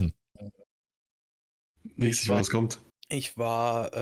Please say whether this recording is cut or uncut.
cut